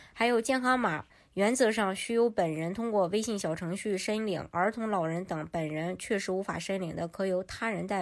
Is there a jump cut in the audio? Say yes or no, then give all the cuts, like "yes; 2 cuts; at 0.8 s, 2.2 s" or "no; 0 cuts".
no; 0 cuts